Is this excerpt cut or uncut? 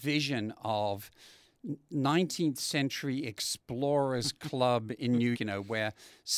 cut